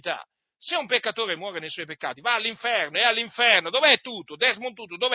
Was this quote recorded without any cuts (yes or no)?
yes